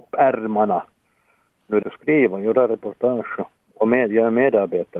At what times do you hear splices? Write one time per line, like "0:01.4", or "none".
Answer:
0:01.8